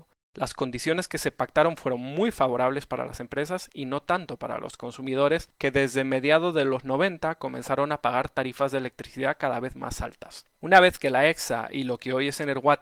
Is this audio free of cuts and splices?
no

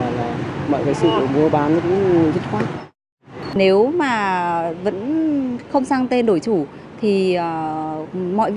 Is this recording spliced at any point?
no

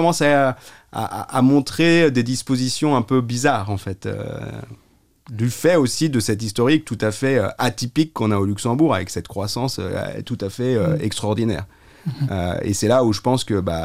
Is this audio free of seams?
yes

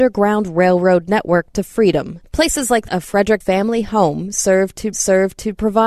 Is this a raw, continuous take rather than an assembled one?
no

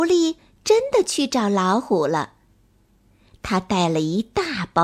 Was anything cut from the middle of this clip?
no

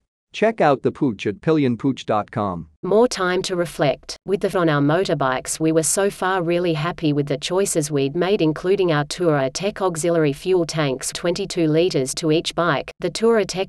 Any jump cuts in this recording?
yes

